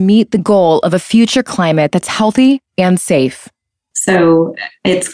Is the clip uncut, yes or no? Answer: yes